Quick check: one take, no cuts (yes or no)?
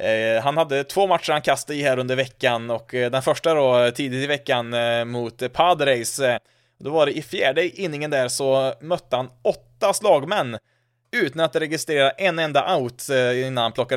yes